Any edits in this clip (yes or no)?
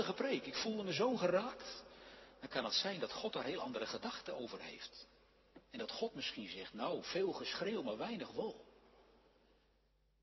no